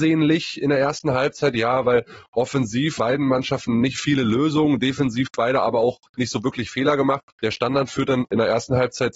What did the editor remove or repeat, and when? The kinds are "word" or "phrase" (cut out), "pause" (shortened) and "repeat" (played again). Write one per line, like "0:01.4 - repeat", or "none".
0:03.0 - word
0:03.9 - word
0:06.1 - pause
0:07.3 - pause